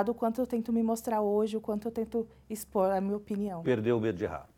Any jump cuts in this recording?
no; 0 cuts

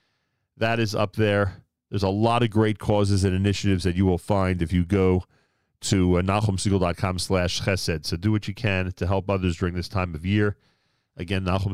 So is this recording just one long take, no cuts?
yes; 0 cuts

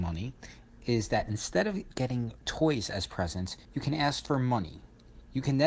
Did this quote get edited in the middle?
yes; 1 cut; at 3.6 s

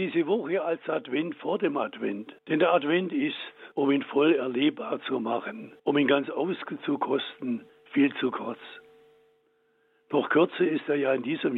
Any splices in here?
yes; 4 cuts; at 2.4 s, 3.7 s, 5.8 s, 7.7 s

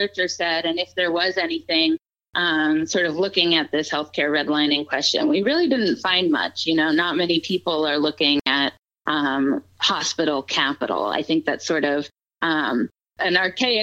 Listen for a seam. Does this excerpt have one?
no; 0 cuts

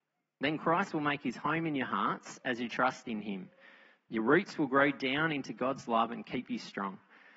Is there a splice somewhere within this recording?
no; 0 cuts

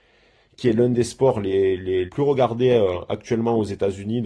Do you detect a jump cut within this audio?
yes; 1 cut; at 2.1 s

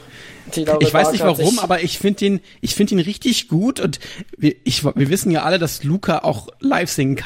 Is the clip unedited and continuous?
yes; 0 cuts

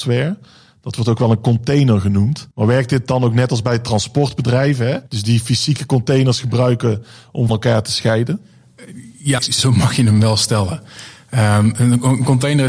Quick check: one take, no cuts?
no; 4 cuts; at 2.5 s, 5.1 s, 7.5 s, 9.4 s

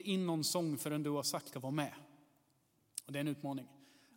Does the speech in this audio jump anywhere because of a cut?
yes; 1 cut; at 1.5 s

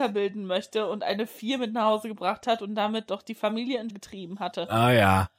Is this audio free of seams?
no; 1 cut; at 3.9 s

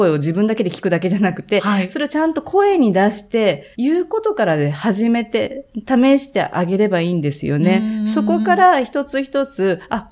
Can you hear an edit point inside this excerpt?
yes; 1 cut; at 3.7 s

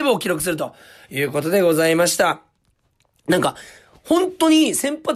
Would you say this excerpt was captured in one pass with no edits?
yes; 0 cuts

